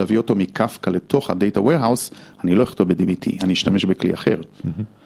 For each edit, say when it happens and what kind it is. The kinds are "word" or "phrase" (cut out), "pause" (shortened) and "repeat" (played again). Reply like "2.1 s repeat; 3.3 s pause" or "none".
none